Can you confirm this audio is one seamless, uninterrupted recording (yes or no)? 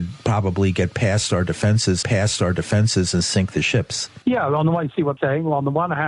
no